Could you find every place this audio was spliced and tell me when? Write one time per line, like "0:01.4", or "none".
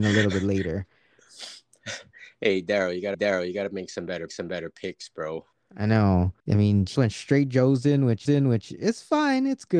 0:03.1
0:04.3
0:05.5
0:06.4
0:07.0
0:08.3